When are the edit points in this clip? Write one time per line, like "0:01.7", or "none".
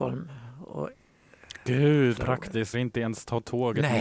0:02.2
0:02.7